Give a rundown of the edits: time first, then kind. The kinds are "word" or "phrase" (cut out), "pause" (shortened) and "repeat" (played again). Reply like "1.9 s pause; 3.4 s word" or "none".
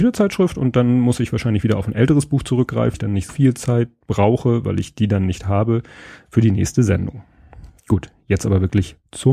2.9 s word; 3.3 s word